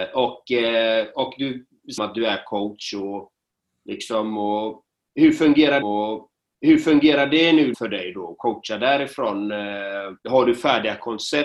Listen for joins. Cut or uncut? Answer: cut